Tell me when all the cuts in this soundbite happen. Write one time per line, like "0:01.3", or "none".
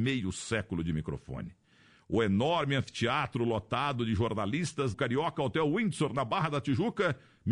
0:04.9